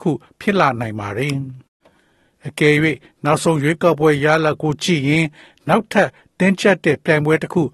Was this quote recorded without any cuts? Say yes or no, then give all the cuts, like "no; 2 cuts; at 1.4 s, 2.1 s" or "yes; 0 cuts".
yes; 0 cuts